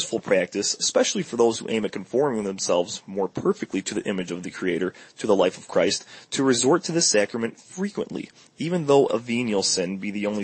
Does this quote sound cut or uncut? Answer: uncut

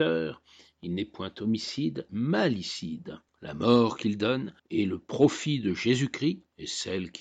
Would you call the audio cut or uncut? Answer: cut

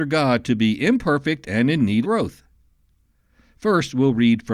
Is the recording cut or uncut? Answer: cut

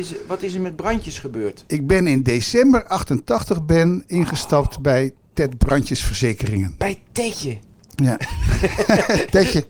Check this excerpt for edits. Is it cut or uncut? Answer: uncut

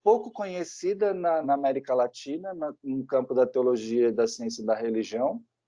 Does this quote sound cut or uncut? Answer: cut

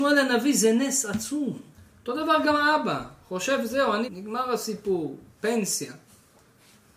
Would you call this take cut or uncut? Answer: cut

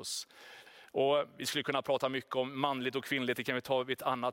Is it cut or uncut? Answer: uncut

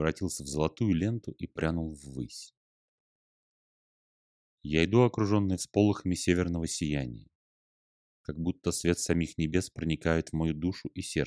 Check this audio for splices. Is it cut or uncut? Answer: uncut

